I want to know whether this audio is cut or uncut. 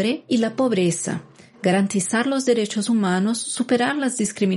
uncut